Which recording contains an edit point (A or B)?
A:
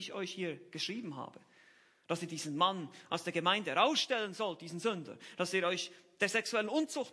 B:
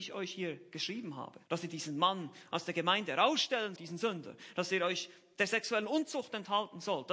B